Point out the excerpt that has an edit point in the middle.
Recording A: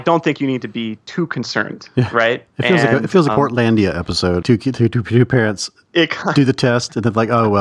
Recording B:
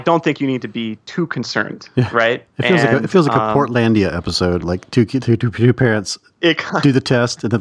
A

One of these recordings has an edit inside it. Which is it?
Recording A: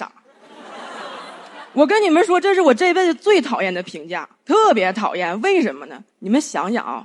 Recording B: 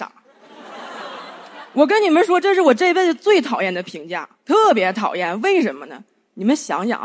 A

